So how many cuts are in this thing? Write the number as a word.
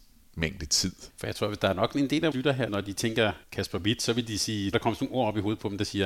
five